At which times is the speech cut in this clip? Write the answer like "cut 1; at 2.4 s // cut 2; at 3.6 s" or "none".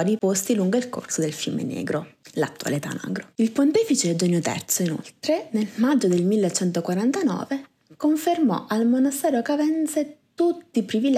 cut 1; at 3.3 s